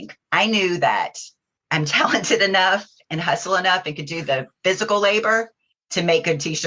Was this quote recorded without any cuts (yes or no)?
yes